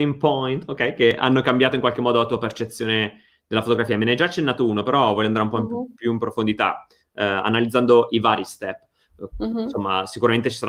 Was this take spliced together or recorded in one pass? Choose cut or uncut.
uncut